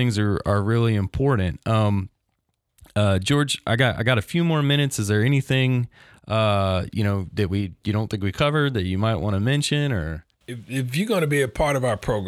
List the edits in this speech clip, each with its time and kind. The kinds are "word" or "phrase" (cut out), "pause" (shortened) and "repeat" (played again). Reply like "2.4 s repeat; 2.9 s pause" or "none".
10.3 s pause

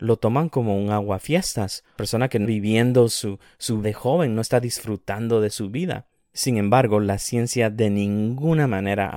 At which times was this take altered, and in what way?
2.0 s word; 2.4 s word; 3.8 s word

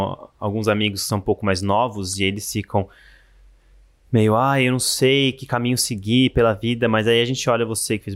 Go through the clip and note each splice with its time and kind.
none

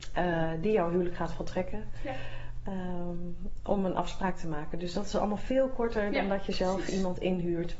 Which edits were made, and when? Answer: none

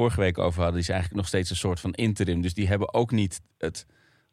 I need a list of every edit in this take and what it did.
none

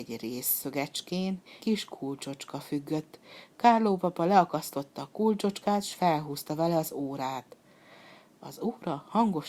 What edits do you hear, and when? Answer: 1.6 s word

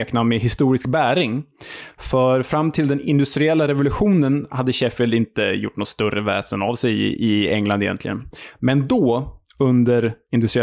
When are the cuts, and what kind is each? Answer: none

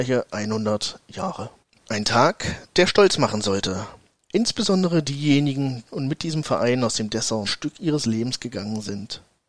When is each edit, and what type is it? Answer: 1.6 s pause; 5.8 s phrase; 7.4 s phrase

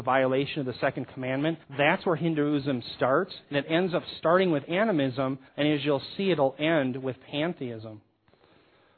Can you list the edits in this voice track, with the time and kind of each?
1.6 s pause; 5.5 s pause

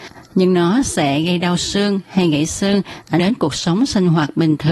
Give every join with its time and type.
3.2 s word

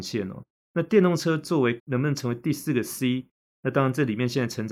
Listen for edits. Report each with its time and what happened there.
1.8 s word

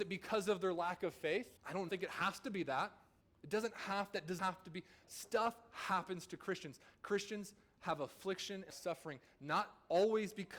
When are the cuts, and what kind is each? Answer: 1.6 s pause; 1.9 s phrase; 3.2 s pause; 4.4 s word; 5.0 s word; 8.7 s phrase

